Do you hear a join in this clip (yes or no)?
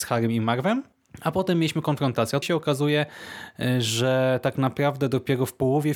yes